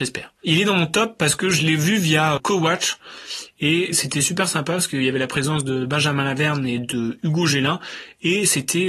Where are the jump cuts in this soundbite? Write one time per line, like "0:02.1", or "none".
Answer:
0:02.4

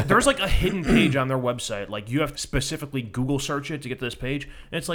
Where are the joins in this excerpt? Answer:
0:02.3

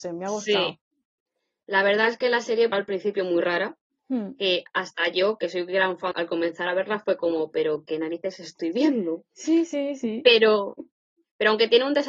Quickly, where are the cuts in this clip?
0:02.7
0:06.1

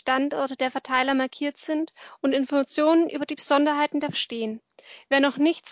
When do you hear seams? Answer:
0:04.1

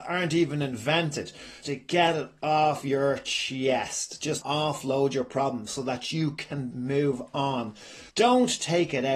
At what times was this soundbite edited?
0:01.6
0:04.4
0:06.7
0:08.1

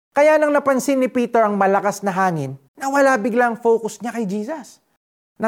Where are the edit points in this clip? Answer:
0:02.7

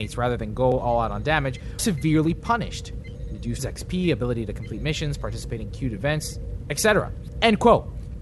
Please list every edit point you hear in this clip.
0:01.8
0:03.6
0:06.6

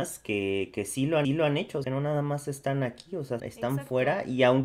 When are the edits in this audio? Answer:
0:01.2
0:01.8
0:03.4

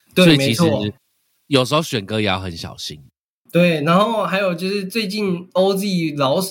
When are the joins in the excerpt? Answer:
none

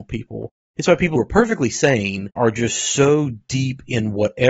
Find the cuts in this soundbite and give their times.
0:01.1
0:02.4

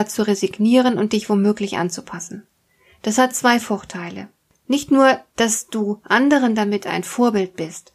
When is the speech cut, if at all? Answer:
none

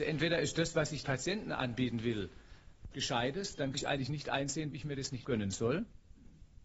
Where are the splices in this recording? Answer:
0:01.0
0:02.9
0:03.7
0:04.7
0:05.2

